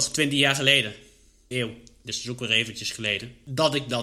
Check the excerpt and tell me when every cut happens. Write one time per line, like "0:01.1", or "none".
0:01.5